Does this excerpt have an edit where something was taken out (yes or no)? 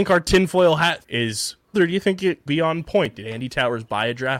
yes